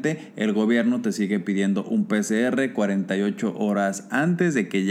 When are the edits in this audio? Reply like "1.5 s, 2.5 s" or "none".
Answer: none

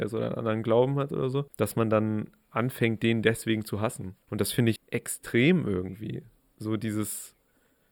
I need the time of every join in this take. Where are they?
1.5 s, 4.2 s, 4.8 s

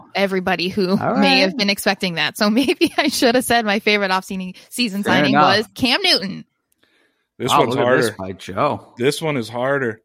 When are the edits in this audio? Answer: 5.7 s

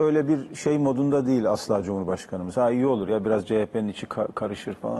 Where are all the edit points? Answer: none

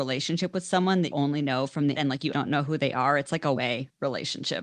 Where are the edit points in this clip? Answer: 1.1 s, 2.0 s, 2.3 s, 3.6 s

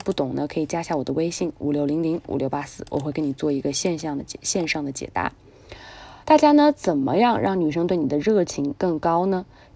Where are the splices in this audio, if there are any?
6.2 s

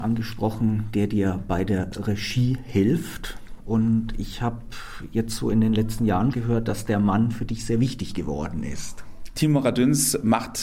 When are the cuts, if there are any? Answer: 6.3 s

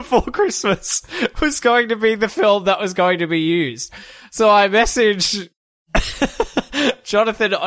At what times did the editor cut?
none

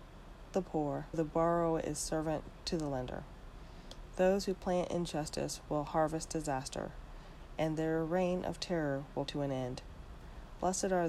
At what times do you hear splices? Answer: 1.1 s, 9.3 s

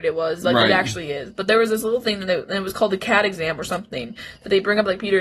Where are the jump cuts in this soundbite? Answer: none

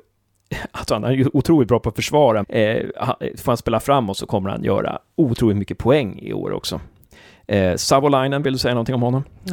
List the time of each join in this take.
2.4 s

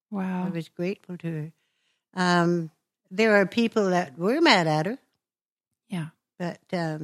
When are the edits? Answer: none

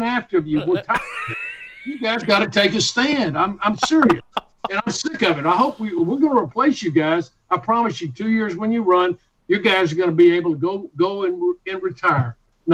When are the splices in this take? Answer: none

